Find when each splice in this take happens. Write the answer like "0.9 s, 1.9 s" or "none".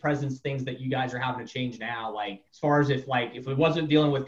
2.5 s